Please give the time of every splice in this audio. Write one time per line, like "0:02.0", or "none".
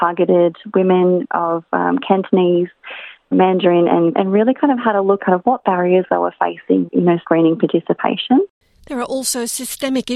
0:03.3
0:04.1
0:05.2
0:06.9
0:07.2